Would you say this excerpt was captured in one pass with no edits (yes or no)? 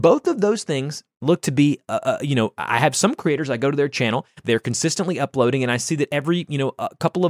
yes